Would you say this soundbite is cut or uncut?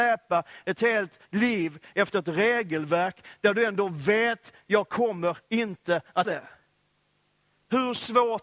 cut